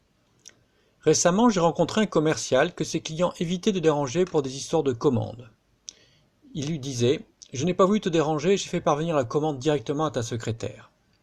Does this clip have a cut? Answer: no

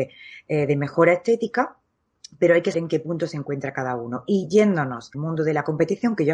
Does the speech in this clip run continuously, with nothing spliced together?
no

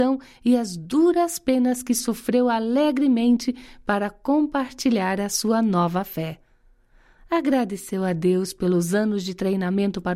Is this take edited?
no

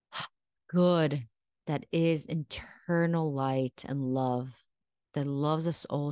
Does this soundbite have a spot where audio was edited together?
no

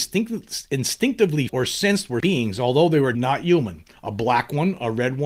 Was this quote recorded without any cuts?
no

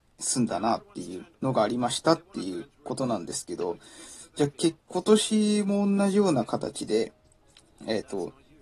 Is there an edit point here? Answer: yes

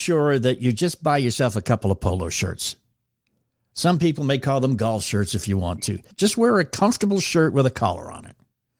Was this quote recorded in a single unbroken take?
yes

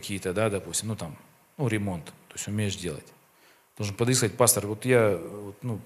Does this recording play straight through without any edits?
yes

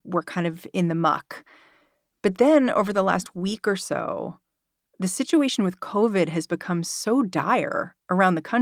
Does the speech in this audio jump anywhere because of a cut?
no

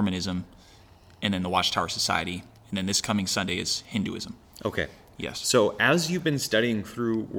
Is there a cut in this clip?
no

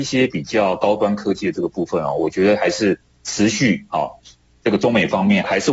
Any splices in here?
no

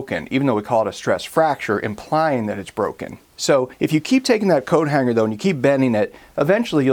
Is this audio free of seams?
yes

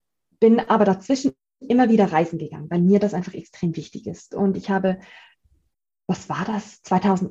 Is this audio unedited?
yes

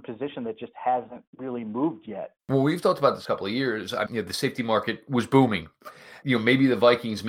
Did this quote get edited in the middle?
yes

